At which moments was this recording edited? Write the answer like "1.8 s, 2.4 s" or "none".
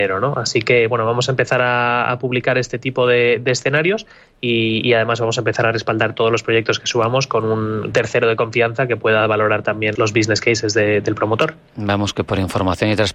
7.9 s, 10.0 s